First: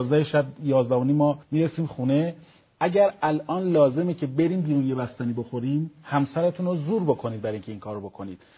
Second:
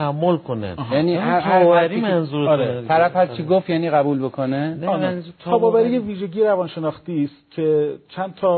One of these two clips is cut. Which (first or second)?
first